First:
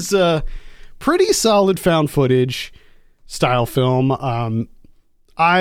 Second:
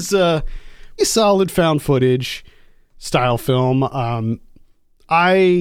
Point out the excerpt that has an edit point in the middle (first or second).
second